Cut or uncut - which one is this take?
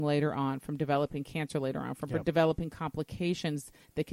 uncut